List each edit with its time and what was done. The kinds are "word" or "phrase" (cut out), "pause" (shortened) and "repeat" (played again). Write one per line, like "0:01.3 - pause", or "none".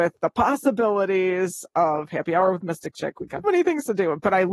0:03.4 - word